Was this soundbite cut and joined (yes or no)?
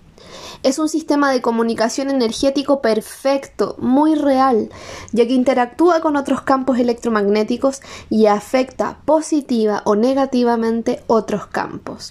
no